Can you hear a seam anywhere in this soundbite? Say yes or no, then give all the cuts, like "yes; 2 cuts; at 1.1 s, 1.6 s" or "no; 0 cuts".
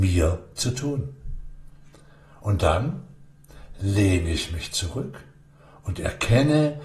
no; 0 cuts